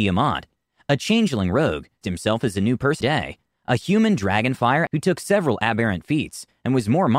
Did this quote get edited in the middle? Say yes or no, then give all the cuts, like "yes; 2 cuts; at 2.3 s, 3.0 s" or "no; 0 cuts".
yes; 3 cuts; at 2.0 s, 3.0 s, 4.9 s